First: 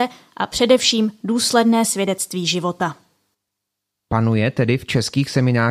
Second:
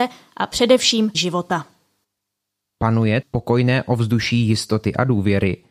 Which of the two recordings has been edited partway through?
second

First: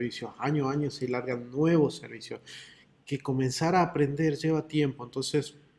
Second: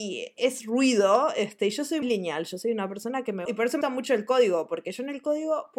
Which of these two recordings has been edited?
second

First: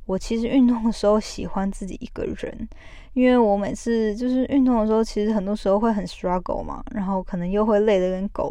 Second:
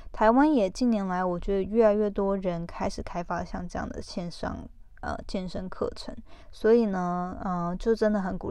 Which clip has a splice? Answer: second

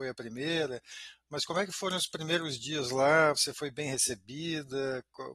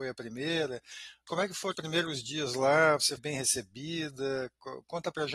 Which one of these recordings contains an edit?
second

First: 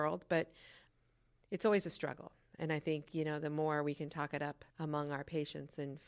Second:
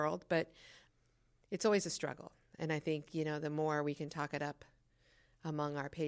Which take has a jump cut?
first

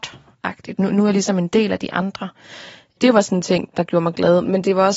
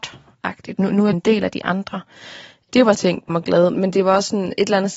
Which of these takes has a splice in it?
second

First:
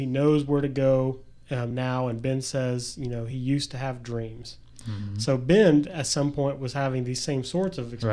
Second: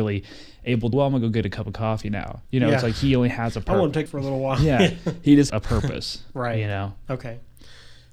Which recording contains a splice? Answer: second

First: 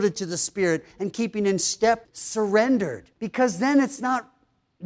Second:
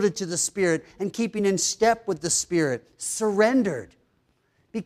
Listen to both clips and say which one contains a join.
first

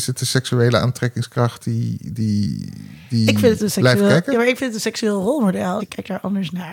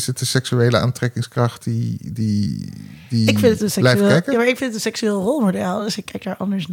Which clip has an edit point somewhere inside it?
first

